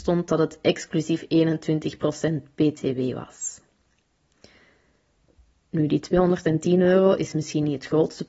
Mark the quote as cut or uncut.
uncut